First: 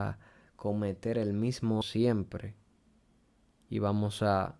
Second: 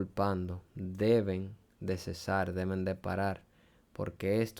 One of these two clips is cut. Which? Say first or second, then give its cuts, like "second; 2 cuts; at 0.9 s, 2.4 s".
first; 1 cut; at 1.8 s